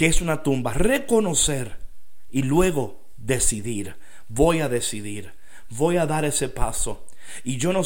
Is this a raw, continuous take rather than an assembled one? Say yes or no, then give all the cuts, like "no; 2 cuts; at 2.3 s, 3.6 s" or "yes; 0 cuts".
yes; 0 cuts